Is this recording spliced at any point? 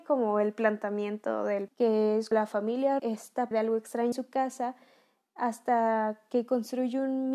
yes; 5 cuts; at 1.7 s, 2.3 s, 3.0 s, 3.5 s, 4.1 s

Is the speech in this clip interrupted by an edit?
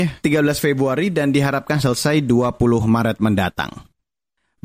no; 0 cuts

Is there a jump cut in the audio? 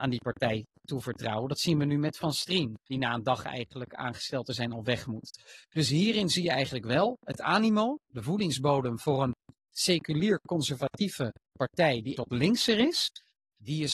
yes; 2 cuts; at 2.8 s, 12.2 s

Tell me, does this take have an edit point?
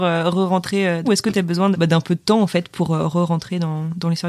yes; 2 cuts; at 1.0 s, 1.7 s

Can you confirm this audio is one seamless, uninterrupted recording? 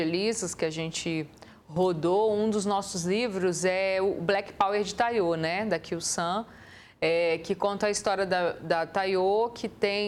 yes; 0 cuts

